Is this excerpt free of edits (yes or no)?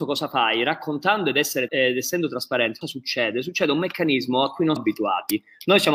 no